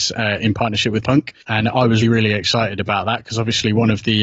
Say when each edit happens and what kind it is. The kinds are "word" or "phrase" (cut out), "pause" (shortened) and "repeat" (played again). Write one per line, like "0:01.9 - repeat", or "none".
0:01.0 - word
0:01.4 - pause
0:02.0 - word